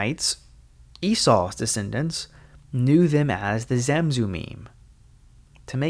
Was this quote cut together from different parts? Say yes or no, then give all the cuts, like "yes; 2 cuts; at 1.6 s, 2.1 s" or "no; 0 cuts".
no; 0 cuts